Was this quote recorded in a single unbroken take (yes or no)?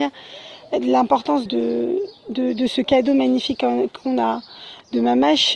no